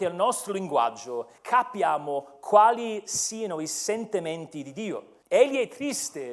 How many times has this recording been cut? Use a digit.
2